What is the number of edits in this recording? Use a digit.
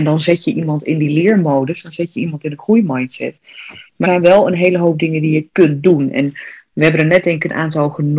1